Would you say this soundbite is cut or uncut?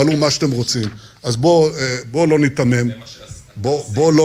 uncut